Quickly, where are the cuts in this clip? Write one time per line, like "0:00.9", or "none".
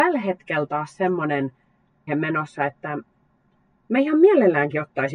0:02.1